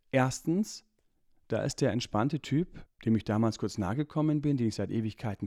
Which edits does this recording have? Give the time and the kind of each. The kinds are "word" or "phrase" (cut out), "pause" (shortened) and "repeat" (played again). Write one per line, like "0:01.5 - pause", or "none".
0:02.9 - pause